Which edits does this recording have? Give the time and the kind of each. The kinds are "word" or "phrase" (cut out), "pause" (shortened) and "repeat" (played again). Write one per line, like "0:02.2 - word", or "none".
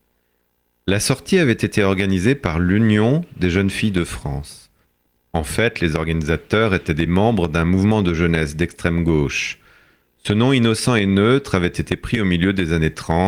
none